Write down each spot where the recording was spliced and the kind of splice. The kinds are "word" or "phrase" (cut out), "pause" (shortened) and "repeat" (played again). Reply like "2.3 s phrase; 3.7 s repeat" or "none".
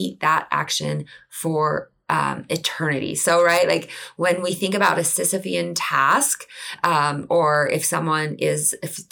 none